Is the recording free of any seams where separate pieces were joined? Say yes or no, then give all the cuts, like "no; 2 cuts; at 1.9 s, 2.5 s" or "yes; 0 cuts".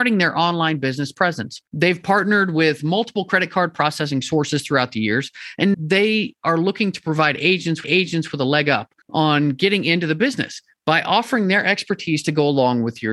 no; 4 cuts; at 1.7 s, 5.7 s, 7.8 s, 9.0 s